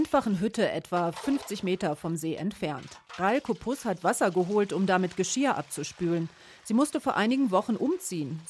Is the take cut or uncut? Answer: uncut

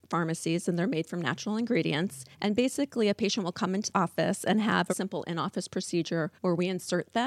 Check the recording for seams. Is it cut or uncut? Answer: cut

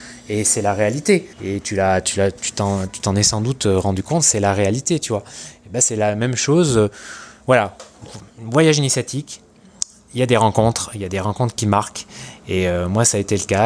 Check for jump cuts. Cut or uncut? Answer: cut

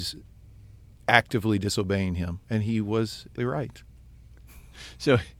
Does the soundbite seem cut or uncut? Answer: cut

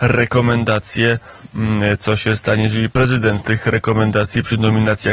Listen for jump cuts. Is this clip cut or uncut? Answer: cut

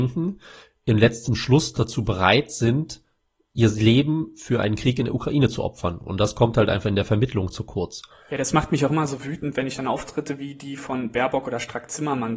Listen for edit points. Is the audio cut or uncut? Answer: uncut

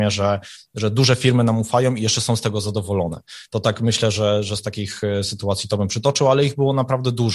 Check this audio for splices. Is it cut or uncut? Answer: uncut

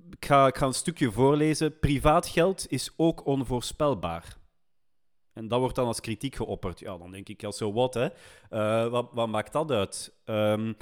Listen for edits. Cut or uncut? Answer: uncut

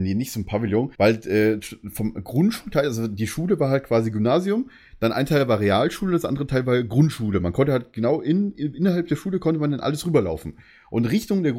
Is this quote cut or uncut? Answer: cut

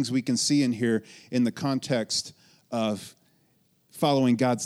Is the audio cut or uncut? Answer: uncut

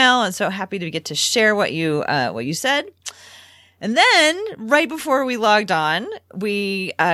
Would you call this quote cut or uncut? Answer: uncut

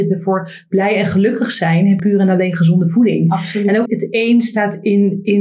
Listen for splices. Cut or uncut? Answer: cut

